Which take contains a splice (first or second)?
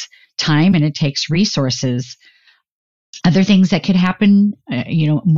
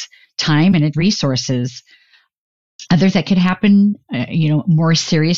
second